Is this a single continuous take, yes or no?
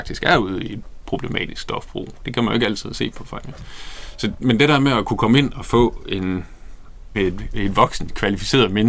no